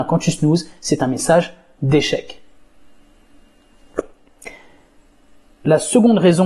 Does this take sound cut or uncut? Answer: uncut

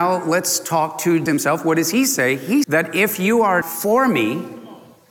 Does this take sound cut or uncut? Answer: cut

